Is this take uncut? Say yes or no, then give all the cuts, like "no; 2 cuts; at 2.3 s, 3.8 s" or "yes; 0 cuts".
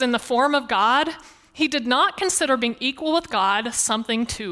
yes; 0 cuts